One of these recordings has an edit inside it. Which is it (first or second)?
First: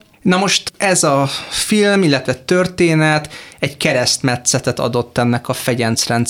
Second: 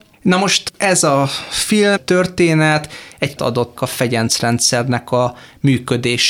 second